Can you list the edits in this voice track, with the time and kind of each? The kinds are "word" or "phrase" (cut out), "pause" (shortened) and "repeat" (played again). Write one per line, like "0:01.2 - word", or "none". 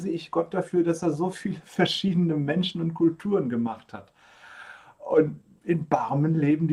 none